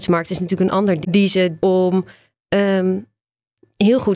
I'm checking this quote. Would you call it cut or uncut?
cut